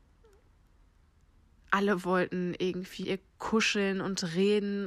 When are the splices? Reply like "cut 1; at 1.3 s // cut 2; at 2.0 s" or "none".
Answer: cut 1; at 3.0 s

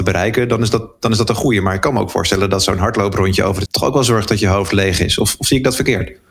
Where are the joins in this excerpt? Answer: cut 1; at 3.7 s

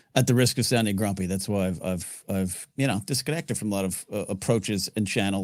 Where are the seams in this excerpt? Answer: cut 1; at 2.7 s

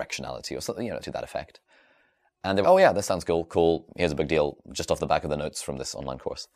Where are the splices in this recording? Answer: cut 1; at 1.0 s // cut 2; at 2.6 s

